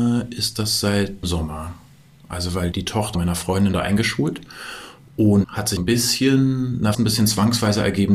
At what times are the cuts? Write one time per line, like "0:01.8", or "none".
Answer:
0:01.2
0:02.7
0:03.1
0:03.7
0:05.4
0:05.8
0:06.9